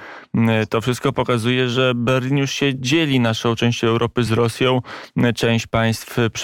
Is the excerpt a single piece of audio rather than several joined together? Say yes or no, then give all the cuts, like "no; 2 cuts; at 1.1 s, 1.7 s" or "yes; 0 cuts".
yes; 0 cuts